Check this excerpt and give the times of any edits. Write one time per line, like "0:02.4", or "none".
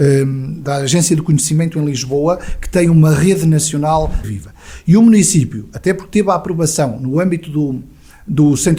0:04.2